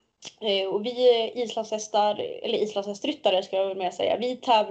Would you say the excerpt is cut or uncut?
uncut